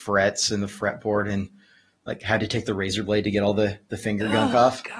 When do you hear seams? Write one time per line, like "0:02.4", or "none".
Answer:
none